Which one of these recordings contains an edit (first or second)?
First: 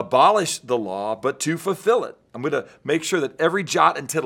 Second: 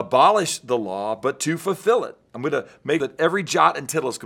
second